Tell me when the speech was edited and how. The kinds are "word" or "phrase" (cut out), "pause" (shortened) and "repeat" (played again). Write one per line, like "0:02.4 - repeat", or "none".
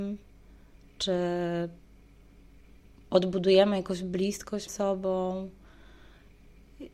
0:04.7 - word